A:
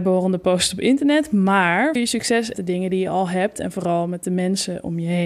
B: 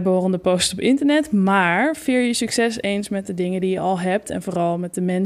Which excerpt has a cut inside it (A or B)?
A